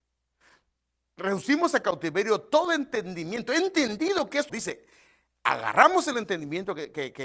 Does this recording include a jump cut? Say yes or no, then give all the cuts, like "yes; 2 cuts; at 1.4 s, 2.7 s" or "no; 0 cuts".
yes; 1 cut; at 4.5 s